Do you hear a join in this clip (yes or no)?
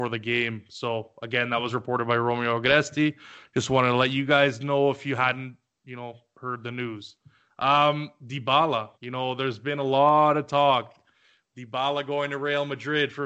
yes